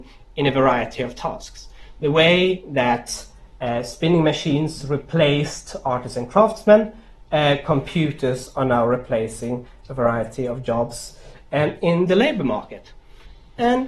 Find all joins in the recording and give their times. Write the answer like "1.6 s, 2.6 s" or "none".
none